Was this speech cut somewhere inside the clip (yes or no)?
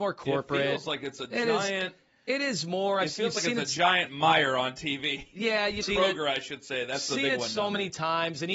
yes